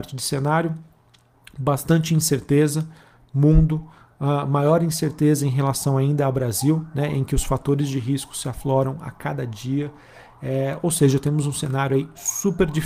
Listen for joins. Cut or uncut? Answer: uncut